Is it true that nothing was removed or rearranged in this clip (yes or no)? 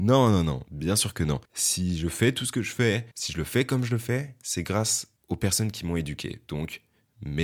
no